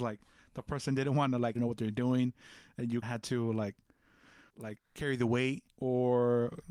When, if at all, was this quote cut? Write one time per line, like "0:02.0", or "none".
0:01.5
0:03.0
0:04.5
0:05.7